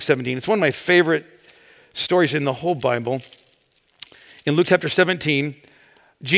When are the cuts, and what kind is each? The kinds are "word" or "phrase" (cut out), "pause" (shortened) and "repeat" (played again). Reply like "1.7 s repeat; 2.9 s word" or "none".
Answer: none